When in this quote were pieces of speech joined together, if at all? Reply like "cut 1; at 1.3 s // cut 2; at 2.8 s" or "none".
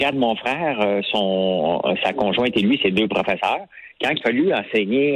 cut 1; at 4.2 s